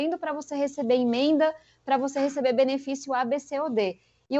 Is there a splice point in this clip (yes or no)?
no